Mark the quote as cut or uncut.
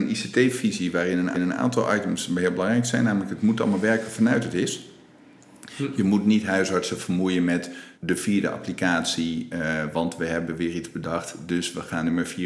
cut